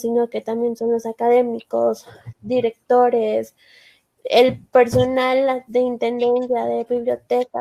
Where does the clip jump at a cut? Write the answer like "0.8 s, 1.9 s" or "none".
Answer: 2.3 s